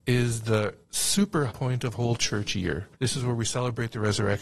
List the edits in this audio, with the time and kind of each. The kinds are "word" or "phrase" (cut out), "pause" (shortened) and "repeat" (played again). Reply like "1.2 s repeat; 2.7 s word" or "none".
1.5 s word; 1.9 s word; 2.9 s pause